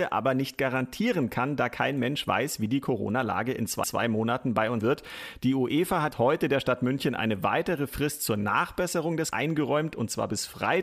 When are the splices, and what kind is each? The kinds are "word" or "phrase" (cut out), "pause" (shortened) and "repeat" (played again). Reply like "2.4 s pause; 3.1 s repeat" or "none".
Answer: 3.8 s repeat; 4.8 s word; 6.1 s word; 9.3 s word